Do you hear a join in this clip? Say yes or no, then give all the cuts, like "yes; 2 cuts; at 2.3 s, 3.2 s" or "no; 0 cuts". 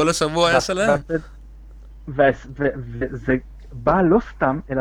no; 0 cuts